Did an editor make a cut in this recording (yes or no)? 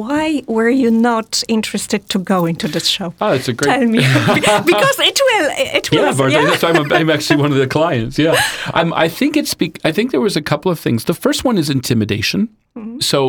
no